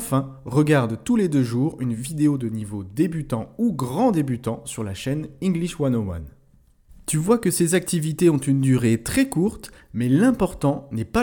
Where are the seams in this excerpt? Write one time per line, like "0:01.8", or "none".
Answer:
none